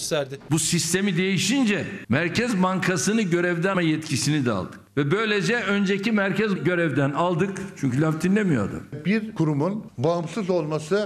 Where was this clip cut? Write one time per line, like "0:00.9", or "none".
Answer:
0:03.7
0:06.6